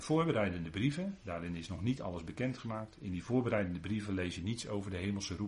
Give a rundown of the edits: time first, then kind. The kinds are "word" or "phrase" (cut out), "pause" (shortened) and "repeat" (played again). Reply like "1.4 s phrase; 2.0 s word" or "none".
none